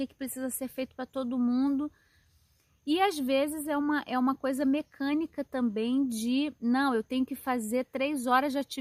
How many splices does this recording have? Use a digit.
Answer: 0